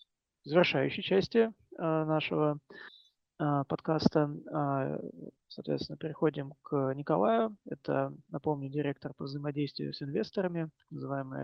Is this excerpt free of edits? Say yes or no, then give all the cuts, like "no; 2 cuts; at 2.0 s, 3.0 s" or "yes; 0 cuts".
yes; 0 cuts